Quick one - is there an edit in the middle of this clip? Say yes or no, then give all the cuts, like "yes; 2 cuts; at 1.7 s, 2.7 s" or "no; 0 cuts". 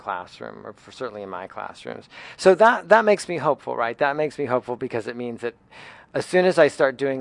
no; 0 cuts